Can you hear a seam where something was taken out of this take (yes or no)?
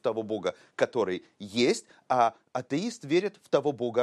no